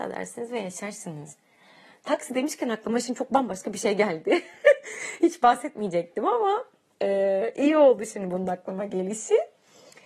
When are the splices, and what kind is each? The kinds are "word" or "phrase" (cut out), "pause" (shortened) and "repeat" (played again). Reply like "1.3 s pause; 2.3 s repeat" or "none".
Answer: none